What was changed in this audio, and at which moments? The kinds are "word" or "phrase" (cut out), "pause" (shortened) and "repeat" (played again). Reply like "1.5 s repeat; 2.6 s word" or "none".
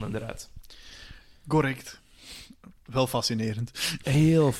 none